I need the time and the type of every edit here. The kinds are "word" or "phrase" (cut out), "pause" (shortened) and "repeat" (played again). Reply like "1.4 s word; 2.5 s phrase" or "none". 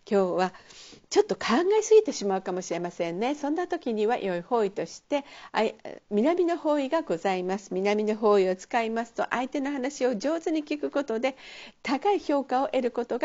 1.0 s pause